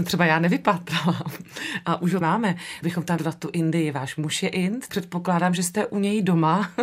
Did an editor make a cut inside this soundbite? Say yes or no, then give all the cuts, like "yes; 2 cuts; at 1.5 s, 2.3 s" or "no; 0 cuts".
yes; 4 cuts; at 2.2 s, 2.8 s, 3.2 s, 4.9 s